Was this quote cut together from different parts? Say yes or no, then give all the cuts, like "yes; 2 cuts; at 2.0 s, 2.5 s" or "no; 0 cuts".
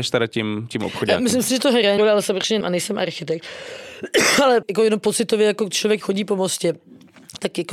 yes; 4 cuts; at 2.0 s, 2.6 s, 4.6 s, 6.0 s